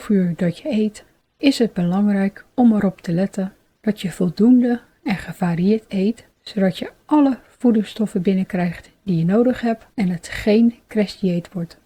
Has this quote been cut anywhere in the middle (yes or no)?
yes